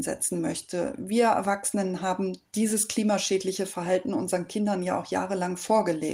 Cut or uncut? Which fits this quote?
uncut